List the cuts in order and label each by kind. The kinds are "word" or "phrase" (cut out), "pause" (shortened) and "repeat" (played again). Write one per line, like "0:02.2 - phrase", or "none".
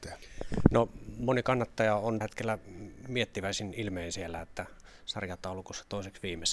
0:02.2 - word